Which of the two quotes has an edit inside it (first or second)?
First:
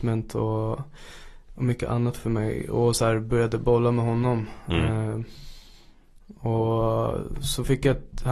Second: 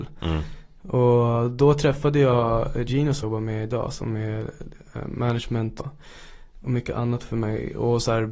second